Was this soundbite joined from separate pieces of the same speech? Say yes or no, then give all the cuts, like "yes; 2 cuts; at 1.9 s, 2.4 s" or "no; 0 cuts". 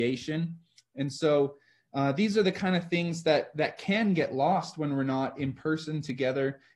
no; 0 cuts